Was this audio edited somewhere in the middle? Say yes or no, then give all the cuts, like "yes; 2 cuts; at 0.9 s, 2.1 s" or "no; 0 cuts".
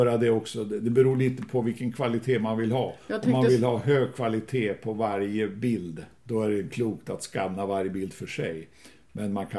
yes; 1 cut; at 6.2 s